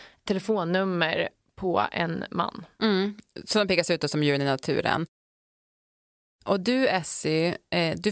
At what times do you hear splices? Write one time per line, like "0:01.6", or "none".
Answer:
none